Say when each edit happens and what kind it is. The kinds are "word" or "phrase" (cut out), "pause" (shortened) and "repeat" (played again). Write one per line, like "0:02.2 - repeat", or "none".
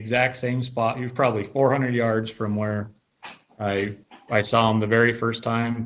none